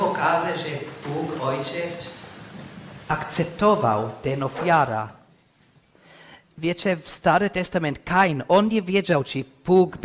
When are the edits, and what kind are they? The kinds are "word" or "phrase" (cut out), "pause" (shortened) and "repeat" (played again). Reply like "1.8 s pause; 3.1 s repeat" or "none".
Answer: none